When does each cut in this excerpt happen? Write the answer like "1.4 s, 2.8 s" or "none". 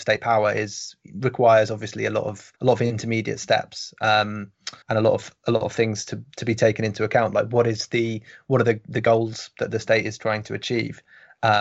2.6 s, 4.8 s